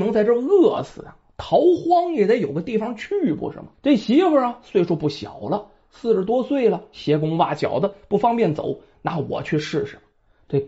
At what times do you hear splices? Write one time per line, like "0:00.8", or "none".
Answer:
0:03.7